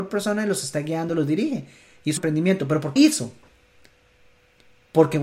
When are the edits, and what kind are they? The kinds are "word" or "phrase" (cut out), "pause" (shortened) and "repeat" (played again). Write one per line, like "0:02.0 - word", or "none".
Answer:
0:01.1 - word
0:02.2 - word
0:03.0 - word